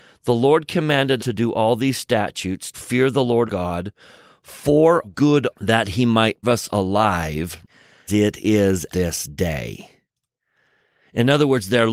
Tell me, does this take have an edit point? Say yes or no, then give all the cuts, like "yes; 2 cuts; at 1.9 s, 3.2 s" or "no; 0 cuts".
yes; 8 cuts; at 1.2 s, 2.7 s, 3.5 s, 5.0 s, 5.5 s, 6.4 s, 8.1 s, 8.9 s